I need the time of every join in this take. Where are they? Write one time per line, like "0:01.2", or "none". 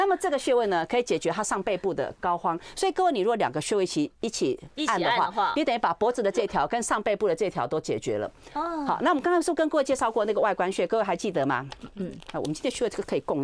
0:04.7